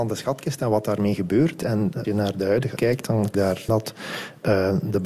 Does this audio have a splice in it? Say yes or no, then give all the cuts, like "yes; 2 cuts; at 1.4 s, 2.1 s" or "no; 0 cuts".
yes; 4 cuts; at 2.0 s, 2.8 s, 3.3 s, 3.7 s